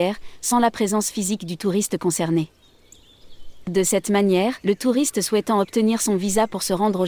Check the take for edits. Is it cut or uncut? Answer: cut